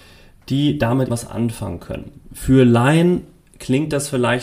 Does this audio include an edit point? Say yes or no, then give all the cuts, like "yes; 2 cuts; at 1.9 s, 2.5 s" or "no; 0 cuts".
yes; 1 cut; at 1.1 s